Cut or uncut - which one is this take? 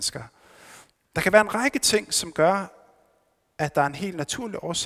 uncut